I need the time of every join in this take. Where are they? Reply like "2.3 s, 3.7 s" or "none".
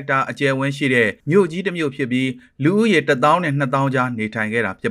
1.2 s